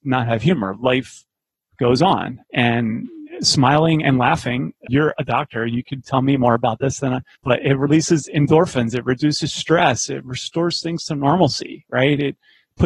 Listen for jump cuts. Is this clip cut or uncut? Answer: cut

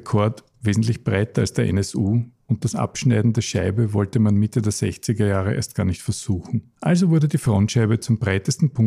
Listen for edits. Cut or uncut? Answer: cut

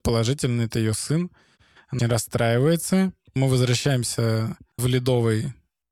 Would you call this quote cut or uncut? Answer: cut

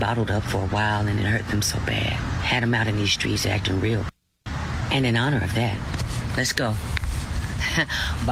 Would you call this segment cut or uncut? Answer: uncut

